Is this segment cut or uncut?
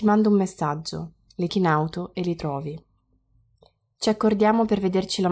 cut